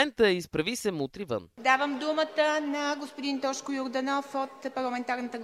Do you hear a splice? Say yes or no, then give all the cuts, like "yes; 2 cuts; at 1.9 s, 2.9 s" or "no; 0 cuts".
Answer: no; 0 cuts